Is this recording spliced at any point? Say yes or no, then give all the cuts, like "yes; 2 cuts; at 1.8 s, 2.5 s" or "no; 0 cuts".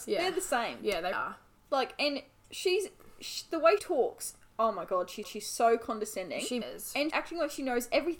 yes; 5 cuts; at 1.1 s, 3.8 s, 5.2 s, 6.6 s, 7.1 s